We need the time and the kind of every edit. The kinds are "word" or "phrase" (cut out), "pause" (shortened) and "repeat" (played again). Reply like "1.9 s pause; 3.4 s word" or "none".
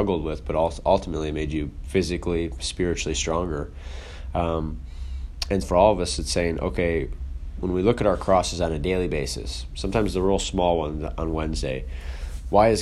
5.6 s word